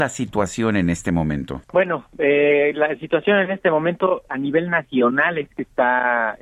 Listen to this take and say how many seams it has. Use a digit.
2